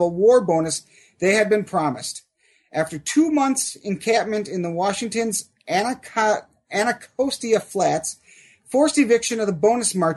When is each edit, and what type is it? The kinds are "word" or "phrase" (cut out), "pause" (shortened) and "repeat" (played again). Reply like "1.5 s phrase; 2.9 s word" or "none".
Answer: none